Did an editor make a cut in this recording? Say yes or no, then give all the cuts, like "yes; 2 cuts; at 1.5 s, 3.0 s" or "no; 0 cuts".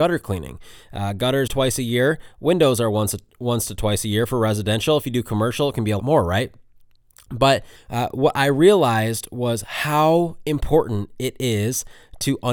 yes; 3 cuts; at 1.5 s, 6.0 s, 7.8 s